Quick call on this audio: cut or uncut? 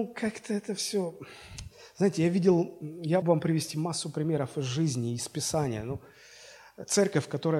cut